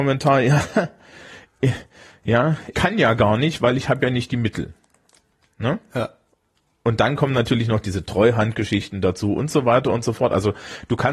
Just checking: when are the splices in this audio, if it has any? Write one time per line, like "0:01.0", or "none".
0:02.7